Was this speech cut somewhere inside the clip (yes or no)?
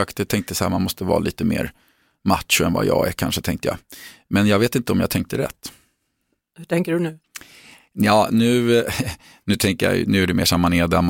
no